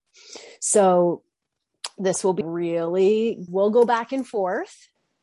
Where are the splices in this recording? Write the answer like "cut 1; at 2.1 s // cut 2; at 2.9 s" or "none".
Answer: cut 1; at 2.4 s // cut 2; at 3.5 s